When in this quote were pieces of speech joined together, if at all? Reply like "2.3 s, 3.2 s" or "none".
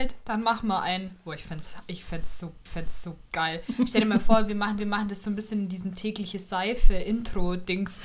2.7 s, 4.8 s